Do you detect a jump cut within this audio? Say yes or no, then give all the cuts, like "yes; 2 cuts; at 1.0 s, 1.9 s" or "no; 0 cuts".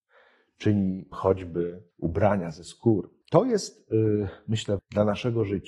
yes; 4 cuts; at 1.1 s, 1.9 s, 3.2 s, 4.8 s